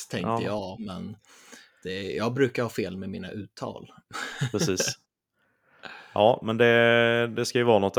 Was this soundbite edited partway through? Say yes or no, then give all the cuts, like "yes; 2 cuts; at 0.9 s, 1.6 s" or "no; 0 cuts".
no; 0 cuts